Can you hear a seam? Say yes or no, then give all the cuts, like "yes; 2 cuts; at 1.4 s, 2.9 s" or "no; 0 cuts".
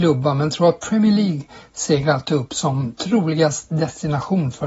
no; 0 cuts